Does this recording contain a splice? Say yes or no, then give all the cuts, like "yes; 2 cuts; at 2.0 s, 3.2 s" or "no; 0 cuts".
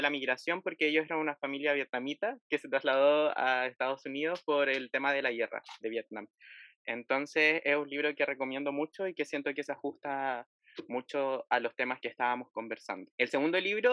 yes; 2 cuts; at 5.8 s, 12.0 s